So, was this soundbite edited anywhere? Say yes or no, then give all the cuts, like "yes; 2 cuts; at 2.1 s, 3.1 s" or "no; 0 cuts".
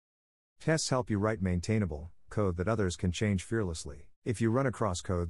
yes; 2 cuts; at 2.3 s, 4.2 s